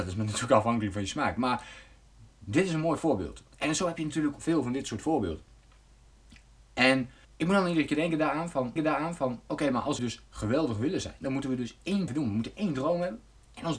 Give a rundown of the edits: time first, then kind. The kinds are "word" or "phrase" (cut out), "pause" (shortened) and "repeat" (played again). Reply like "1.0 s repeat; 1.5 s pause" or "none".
4.4 s word; 7.2 s pause; 8.8 s repeat; 10.0 s word; 12.1 s phrase